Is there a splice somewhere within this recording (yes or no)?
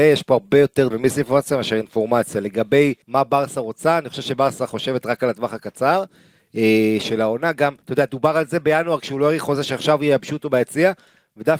yes